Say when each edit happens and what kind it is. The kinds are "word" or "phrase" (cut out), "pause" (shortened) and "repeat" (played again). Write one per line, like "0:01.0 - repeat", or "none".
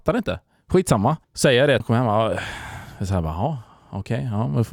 0:01.2 - pause
0:01.8 - phrase

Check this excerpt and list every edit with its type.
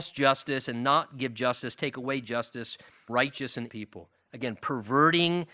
0:03.1 - word
0:03.7 - word

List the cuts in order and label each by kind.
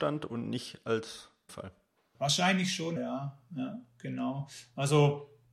0:01.5 - phrase
0:03.0 - word

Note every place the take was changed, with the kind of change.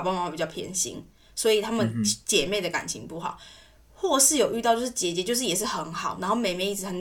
none

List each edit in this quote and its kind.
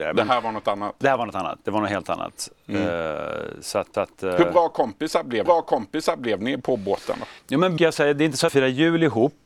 0:03.9 - repeat
0:05.5 - repeat
0:07.4 - pause
0:07.8 - phrase
0:08.5 - phrase

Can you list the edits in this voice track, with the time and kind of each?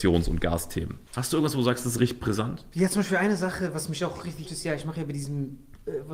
0:01.1 - pause
0:04.4 - word

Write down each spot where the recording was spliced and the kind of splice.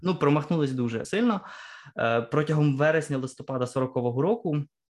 0:01.0 - word

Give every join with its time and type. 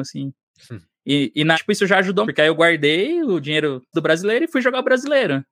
0:01.5 - word
0:02.2 - word
0:03.9 - word

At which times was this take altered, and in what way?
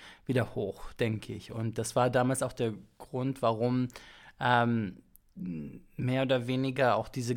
none

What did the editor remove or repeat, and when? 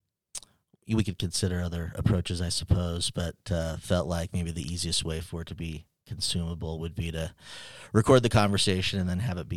none

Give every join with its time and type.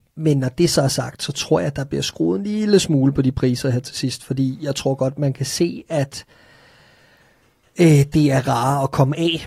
none

